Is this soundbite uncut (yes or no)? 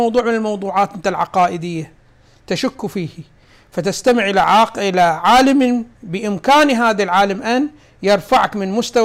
yes